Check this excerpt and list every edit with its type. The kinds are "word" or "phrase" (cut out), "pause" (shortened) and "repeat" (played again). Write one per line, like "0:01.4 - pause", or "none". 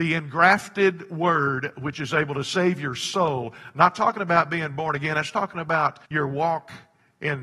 0:06.0 - pause